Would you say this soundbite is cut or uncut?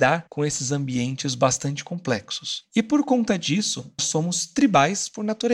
cut